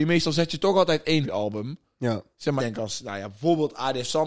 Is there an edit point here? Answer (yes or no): yes